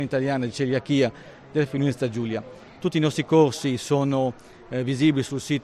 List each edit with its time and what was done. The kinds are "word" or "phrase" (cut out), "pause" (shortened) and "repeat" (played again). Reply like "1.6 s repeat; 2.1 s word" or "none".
none